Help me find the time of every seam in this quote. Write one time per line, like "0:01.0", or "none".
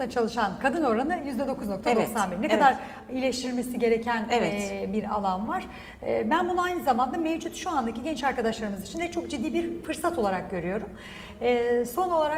none